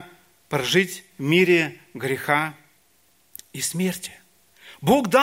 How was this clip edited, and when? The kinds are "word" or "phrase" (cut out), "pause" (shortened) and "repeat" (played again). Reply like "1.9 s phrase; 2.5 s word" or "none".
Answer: 1.1 s word